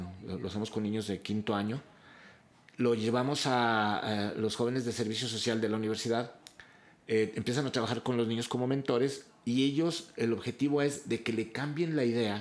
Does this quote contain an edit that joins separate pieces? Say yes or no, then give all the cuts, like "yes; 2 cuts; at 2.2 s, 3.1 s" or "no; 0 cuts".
no; 0 cuts